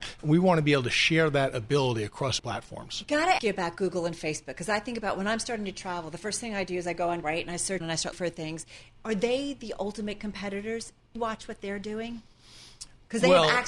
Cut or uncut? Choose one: cut